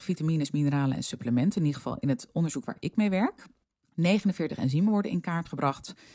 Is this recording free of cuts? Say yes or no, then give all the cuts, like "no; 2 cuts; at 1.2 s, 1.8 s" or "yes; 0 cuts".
no; 1 cut; at 3.7 s